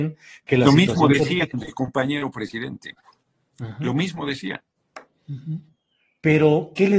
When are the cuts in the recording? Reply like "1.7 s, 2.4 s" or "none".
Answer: none